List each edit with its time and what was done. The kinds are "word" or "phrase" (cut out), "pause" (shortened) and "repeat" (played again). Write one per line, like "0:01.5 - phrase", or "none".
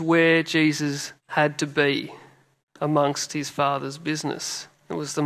0:01.2 - pause
0:02.6 - pause